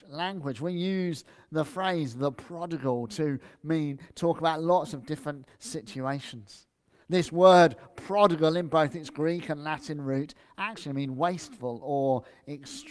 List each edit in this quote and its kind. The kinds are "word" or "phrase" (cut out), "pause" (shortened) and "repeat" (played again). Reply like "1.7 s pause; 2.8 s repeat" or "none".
none